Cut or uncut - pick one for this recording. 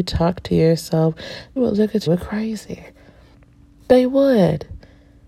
cut